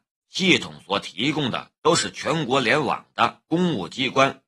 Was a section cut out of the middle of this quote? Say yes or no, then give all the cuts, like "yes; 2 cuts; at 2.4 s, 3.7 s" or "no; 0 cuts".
no; 0 cuts